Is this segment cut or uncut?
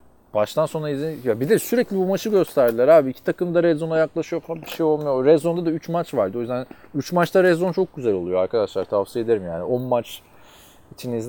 uncut